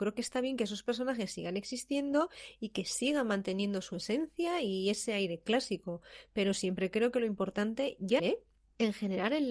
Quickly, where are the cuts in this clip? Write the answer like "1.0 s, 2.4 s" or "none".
8.2 s